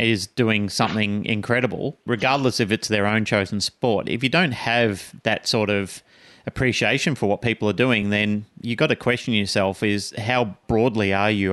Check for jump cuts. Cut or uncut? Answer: uncut